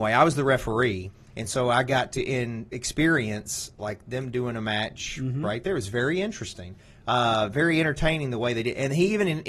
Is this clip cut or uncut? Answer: uncut